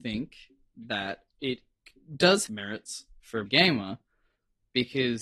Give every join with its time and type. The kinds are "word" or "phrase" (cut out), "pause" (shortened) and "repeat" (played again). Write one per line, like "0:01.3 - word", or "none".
0:02.5 - word
0:03.5 - word